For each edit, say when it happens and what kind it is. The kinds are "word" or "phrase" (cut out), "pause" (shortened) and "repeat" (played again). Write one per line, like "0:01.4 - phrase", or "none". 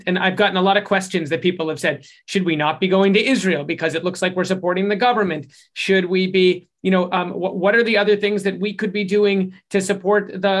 none